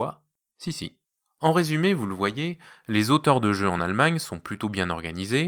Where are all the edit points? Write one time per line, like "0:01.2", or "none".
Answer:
none